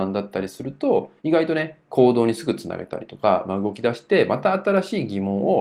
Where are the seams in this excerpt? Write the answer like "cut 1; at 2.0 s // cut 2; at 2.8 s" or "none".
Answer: cut 1; at 1.2 s